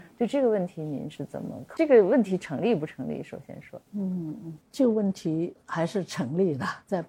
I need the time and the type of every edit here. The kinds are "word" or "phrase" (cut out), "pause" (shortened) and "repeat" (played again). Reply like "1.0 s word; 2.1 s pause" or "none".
3.9 s pause

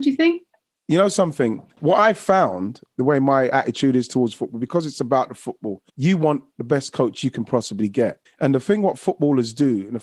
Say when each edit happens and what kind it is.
1.7 s pause; 5.9 s pause; 8.3 s pause

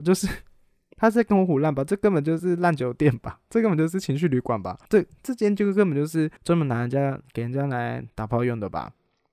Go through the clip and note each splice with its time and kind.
4.8 s pause; 6.4 s pause; 8.1 s pause

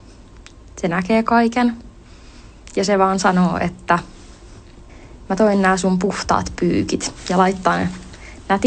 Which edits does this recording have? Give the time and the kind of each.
none

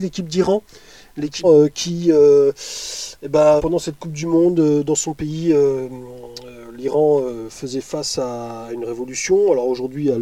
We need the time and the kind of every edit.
1.4 s word; 3.6 s word

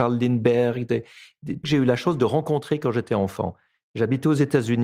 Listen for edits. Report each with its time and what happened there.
1.6 s phrase

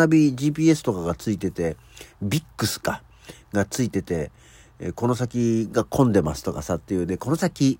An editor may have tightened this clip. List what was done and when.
none

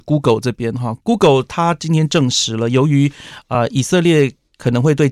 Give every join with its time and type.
none

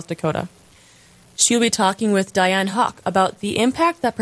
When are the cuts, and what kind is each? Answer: none

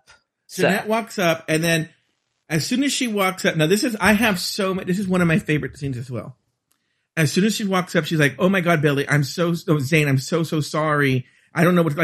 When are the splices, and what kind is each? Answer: none

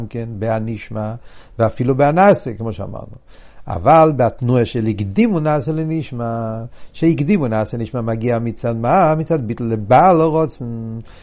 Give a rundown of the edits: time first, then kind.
none

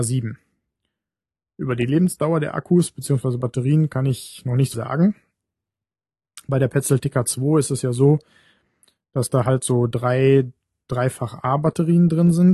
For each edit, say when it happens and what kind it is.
4.7 s word

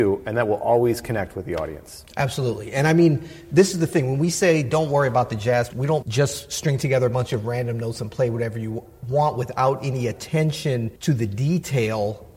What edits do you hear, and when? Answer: 5.7 s word; 6.0 s word; 11.0 s pause

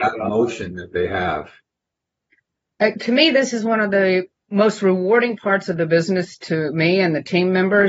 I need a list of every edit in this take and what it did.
2.9 s word; 4.3 s pause

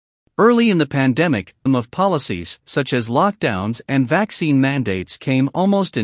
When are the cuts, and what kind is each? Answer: 1.7 s word

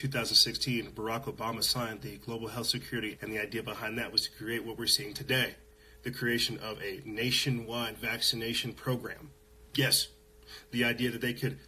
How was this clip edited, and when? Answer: 3.2 s word; 9.7 s pause

